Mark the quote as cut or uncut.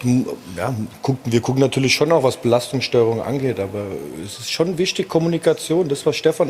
uncut